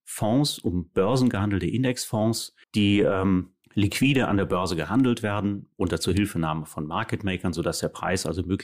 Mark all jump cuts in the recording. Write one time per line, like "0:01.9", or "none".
0:02.6
0:03.6
0:05.7